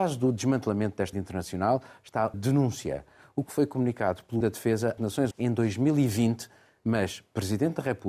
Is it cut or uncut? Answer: cut